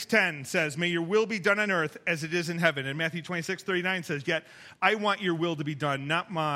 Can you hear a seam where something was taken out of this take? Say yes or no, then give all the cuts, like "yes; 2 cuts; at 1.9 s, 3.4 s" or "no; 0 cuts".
no; 0 cuts